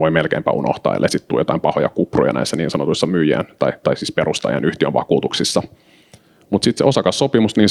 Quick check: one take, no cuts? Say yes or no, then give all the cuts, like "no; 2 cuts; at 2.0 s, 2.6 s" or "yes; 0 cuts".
yes; 0 cuts